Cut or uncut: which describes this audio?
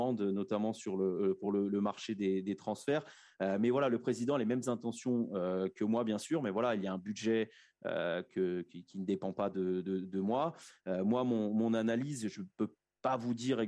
uncut